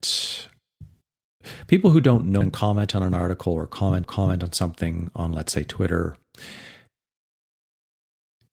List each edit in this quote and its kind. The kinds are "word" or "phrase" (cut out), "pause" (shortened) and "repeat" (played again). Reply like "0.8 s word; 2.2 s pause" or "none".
2.4 s phrase; 4.0 s repeat